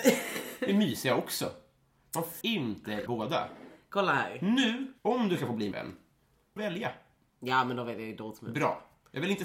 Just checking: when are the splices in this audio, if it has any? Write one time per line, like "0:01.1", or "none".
0:02.4
0:03.1
0:05.0
0:05.7
0:06.6